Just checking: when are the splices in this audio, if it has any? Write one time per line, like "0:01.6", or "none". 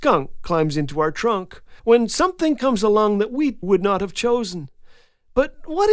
0:01.8
0:03.6